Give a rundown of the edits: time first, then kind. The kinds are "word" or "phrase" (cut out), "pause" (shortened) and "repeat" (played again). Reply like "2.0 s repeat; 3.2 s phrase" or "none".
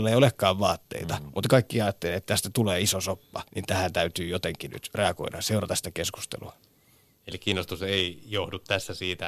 3.5 s pause